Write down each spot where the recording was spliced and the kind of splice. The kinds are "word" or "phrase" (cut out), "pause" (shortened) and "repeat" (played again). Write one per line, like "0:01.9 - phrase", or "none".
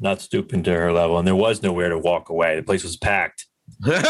none